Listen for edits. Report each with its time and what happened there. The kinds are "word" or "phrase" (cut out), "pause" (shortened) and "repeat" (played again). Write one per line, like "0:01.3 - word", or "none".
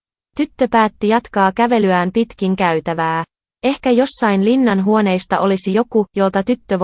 none